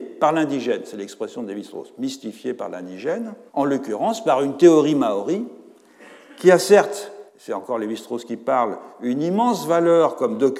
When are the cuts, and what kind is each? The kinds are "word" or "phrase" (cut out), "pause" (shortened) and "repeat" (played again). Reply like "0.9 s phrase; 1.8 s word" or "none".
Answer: 3.5 s pause; 7.3 s pause